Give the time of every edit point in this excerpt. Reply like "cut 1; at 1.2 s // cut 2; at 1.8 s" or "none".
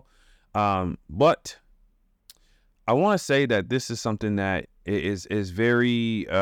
none